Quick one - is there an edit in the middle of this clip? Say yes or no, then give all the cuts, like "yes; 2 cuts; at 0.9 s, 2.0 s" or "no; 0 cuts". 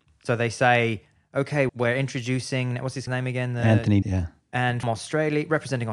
yes; 4 cuts; at 1.7 s, 3.1 s, 4.0 s, 4.8 s